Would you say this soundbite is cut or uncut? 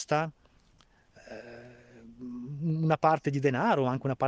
uncut